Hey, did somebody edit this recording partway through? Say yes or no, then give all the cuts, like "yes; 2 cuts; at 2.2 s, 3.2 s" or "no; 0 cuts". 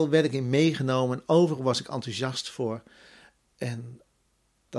no; 0 cuts